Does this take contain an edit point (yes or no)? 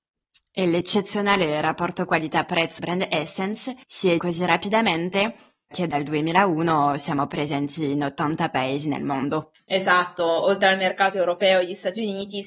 yes